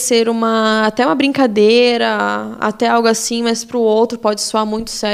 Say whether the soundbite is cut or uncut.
uncut